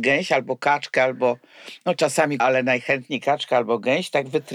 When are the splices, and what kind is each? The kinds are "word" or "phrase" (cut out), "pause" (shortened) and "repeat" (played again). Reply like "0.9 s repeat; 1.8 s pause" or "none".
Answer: 2.4 s word